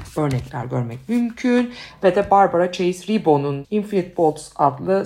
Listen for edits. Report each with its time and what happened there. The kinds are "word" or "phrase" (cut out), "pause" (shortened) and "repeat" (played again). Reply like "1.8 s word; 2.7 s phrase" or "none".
3.6 s word